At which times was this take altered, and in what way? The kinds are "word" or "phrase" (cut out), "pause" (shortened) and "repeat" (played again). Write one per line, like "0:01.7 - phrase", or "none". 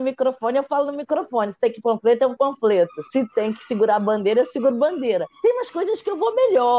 0:01.8 - word
0:02.3 - word
0:05.3 - pause